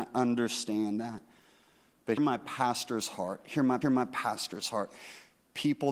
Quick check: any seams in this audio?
yes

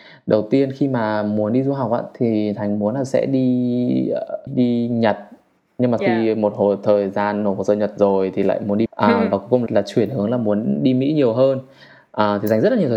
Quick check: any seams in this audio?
yes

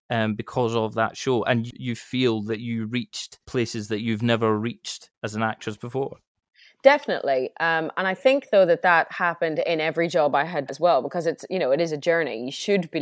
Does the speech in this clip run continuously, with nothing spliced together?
no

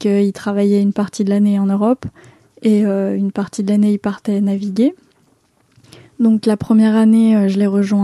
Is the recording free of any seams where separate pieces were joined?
yes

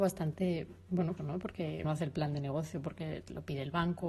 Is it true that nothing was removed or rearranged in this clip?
no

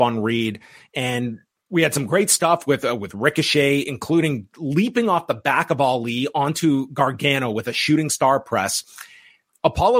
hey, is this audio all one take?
yes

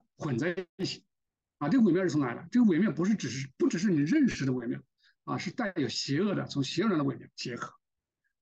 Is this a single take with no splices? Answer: yes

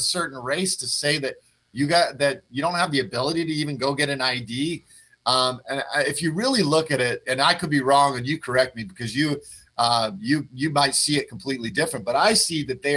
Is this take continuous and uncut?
yes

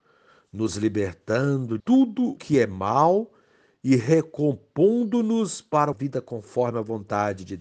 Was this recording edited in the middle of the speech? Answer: yes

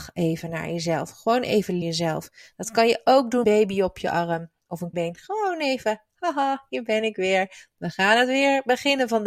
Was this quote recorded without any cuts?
no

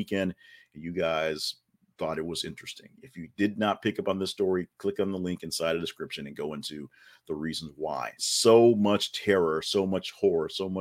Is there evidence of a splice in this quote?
no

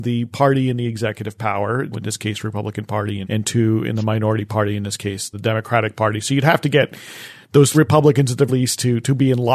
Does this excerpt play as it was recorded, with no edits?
no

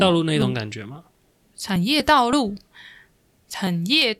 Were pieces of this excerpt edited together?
no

